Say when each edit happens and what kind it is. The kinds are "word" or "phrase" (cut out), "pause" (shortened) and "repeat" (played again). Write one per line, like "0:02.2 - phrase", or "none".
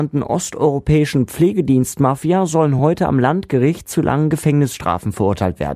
none